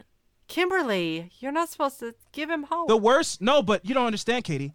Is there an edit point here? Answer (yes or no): no